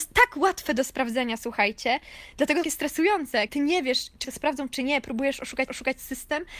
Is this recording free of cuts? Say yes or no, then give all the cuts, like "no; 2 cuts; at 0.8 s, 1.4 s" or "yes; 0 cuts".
no; 4 cuts; at 2.6 s, 3.5 s, 4.2 s, 5.7 s